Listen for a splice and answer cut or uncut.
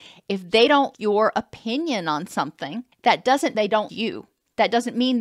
cut